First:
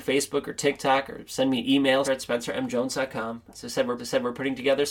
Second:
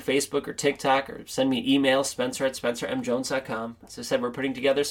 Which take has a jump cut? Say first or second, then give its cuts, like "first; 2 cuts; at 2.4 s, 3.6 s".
first; 2 cuts; at 2.0 s, 4.0 s